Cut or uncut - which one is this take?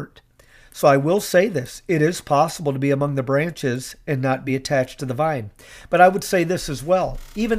uncut